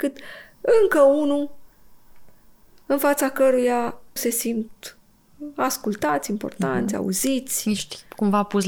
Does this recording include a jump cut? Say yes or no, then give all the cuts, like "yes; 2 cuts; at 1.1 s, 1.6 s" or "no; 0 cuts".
yes; 1 cut; at 4.2 s